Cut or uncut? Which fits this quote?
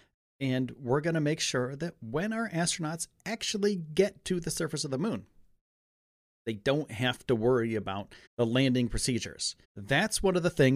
cut